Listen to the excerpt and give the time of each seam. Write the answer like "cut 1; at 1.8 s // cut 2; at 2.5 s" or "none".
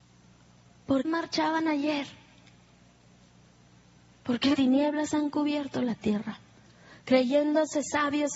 cut 1; at 1.0 s // cut 2; at 4.5 s